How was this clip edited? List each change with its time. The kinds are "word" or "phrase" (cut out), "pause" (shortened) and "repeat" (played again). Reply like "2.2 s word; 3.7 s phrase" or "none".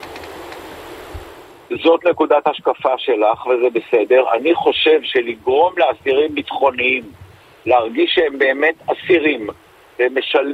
none